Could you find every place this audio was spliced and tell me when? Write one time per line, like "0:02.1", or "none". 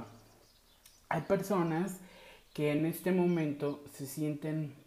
none